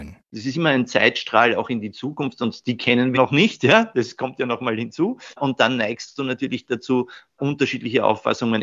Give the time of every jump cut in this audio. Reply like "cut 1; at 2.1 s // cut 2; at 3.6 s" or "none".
cut 1; at 3.1 s